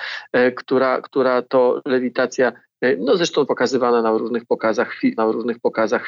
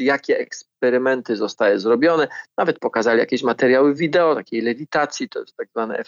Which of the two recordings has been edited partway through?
first; 2 cuts; at 3.5 s, 5.2 s

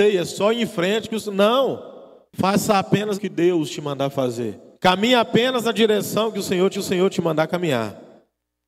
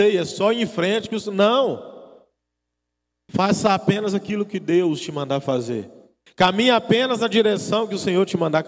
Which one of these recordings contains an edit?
first; 4 cuts; at 2.3 s, 3.1 s, 4.8 s, 6.7 s

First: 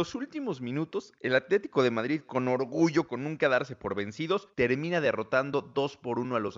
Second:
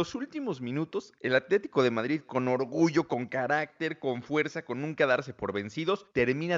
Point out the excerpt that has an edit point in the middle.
first; 1 cut; at 3.1 s

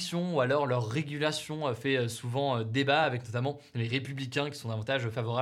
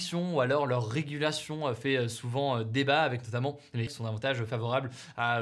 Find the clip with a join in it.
second; 1 cut; at 3.9 s

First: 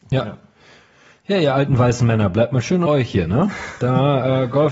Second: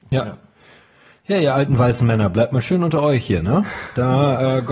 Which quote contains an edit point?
first; 1 cut; at 2.9 s

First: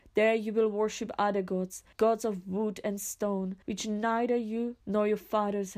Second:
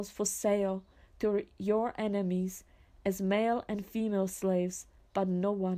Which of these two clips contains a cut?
first; 3 cuts; at 1.9 s, 3.6 s, 4.8 s

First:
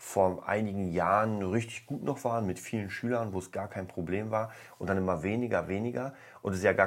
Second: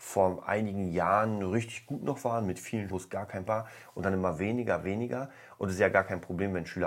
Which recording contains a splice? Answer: second; 2 cuts; at 2.9 s, 3.5 s

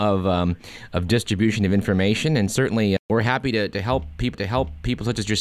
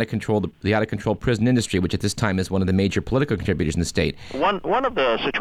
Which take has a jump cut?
first; 2 cuts; at 3.0 s, 4.3 s

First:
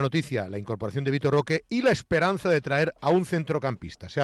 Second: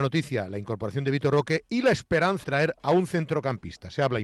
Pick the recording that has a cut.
second; 1 cut; at 2.4 s

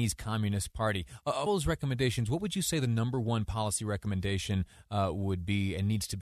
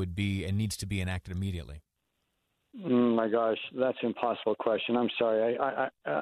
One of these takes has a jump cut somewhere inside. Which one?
first; 1 cut; at 1.5 s

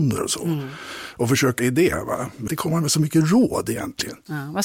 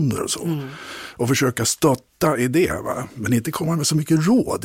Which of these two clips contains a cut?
first; 2 cuts; at 1.6 s, 2.5 s

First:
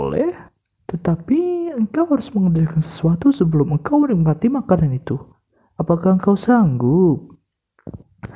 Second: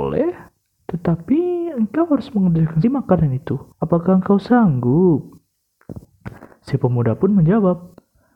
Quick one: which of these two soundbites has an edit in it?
second; 2 cuts; at 2.8 s, 3.7 s

